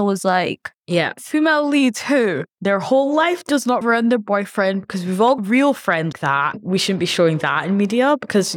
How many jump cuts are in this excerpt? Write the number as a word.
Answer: four